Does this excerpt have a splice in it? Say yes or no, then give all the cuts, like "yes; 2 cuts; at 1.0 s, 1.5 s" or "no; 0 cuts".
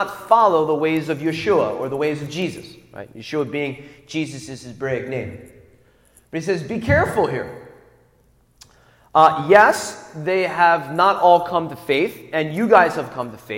no; 0 cuts